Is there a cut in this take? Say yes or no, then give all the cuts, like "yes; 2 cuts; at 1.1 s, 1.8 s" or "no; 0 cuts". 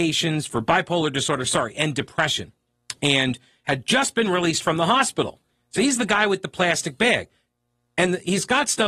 no; 0 cuts